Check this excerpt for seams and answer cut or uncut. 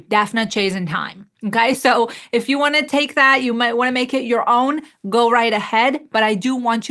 uncut